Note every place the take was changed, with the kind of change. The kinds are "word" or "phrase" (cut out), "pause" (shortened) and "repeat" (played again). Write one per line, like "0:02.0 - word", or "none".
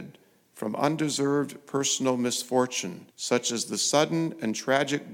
0:03.1 - pause